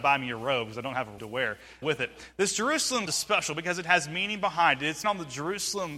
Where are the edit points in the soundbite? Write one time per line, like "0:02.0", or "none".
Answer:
0:01.2
0:01.8
0:03.1
0:05.0